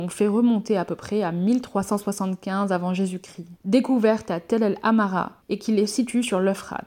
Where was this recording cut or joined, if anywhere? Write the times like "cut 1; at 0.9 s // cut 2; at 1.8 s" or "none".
cut 1; at 3.6 s // cut 2; at 5.4 s